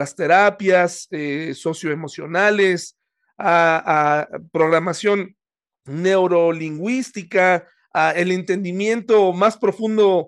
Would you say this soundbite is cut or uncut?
uncut